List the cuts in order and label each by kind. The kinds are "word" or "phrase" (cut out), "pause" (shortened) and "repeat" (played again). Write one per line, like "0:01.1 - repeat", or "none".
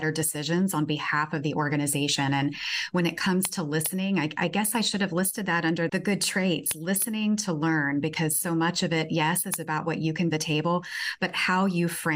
0:05.9 - word
0:10.3 - phrase